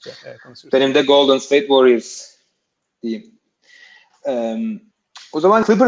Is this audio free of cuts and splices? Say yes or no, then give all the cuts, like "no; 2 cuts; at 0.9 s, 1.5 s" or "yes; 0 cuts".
yes; 0 cuts